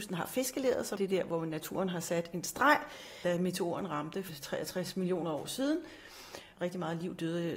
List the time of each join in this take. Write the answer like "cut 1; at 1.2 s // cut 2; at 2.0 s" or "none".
cut 1; at 1.0 s // cut 2; at 6.5 s